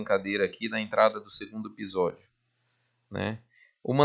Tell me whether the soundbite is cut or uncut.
uncut